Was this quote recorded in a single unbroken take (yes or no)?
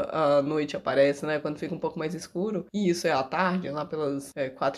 yes